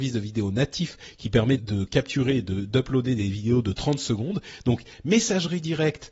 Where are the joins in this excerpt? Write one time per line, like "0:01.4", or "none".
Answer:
0:01.6